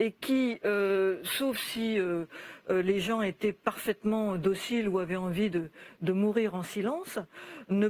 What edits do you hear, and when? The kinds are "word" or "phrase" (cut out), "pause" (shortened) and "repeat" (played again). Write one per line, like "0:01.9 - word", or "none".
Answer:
none